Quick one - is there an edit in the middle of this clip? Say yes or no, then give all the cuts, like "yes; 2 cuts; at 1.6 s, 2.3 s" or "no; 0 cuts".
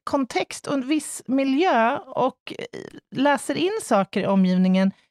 no; 0 cuts